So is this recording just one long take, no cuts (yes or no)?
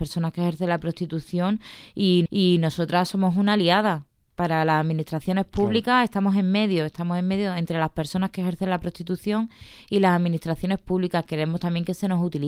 no